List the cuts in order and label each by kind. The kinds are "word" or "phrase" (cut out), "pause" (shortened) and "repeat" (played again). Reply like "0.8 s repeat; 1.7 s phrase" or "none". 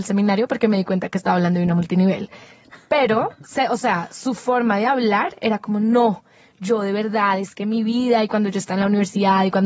none